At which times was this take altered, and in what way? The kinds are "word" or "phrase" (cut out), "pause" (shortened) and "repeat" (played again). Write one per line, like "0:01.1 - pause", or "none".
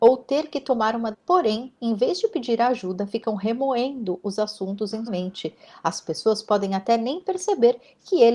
0:01.1 - word
0:05.1 - word